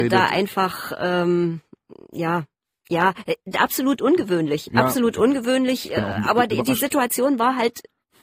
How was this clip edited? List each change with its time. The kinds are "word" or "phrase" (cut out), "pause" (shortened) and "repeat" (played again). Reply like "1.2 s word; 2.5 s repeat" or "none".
none